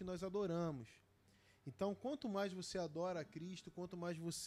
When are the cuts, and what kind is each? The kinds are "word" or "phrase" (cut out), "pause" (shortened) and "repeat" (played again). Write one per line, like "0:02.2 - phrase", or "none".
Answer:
none